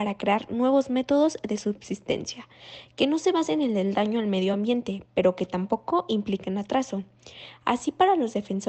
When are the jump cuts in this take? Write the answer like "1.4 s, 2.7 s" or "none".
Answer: none